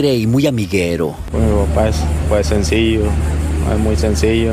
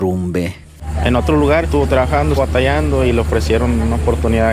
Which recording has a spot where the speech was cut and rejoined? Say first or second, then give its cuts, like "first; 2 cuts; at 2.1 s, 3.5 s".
second; 2 cuts; at 1.6 s, 2.4 s